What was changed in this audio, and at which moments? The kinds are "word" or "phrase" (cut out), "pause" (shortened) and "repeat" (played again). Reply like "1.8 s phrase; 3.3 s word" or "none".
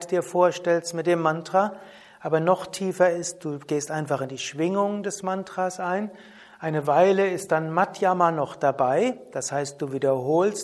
none